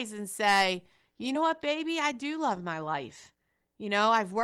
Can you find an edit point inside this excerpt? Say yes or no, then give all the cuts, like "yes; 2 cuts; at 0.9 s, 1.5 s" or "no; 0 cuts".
no; 0 cuts